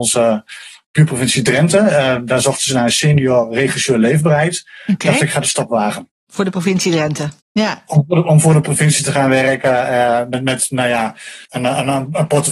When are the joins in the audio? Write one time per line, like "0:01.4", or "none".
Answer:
0:06.2
0:07.4
0:11.4